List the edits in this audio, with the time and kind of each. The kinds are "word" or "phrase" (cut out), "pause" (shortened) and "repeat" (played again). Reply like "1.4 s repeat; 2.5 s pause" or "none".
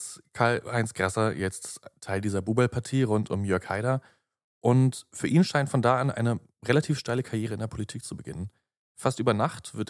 none